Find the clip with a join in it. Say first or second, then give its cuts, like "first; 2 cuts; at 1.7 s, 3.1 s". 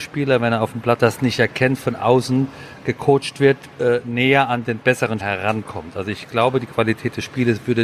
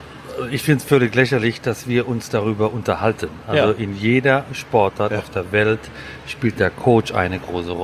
first; 2 cuts; at 1.0 s, 5.2 s